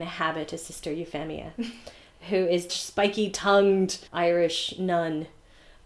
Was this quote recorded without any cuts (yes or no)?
no